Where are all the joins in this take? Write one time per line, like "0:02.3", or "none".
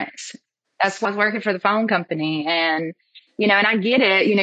0:01.0